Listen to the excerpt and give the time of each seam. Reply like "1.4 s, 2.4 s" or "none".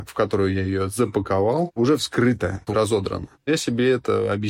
2.7 s